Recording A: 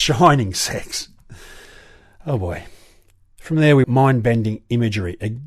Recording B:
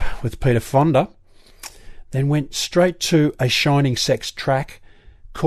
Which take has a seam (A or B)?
A